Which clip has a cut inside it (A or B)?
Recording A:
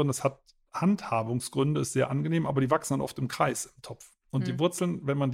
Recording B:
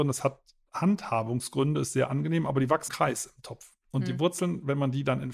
B